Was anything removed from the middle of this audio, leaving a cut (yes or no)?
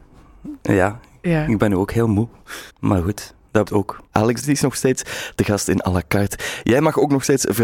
yes